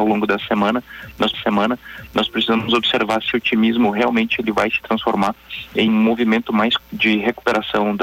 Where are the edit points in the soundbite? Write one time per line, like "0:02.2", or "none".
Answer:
0:01.3
0:03.3
0:05.9
0:06.8